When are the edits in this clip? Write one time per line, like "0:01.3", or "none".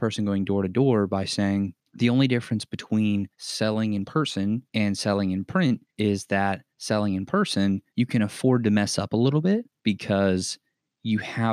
0:01.9
0:03.3
0:04.7
0:05.9
0:06.7
0:07.9
0:09.8